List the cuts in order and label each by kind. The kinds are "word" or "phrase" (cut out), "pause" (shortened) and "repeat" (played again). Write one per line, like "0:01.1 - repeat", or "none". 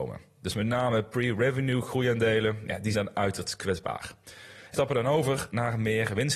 0:02.9 - word
0:04.7 - word